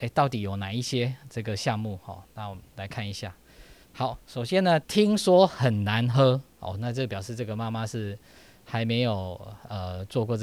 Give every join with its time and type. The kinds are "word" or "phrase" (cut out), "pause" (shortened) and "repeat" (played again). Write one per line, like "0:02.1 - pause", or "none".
0:03.8 - pause
0:04.8 - phrase
0:06.5 - pause